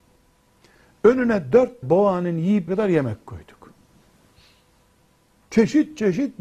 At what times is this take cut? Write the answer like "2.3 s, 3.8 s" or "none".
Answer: 1.8 s, 2.7 s